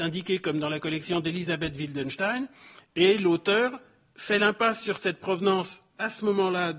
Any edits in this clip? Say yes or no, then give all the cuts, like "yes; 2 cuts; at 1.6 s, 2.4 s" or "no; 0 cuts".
no; 0 cuts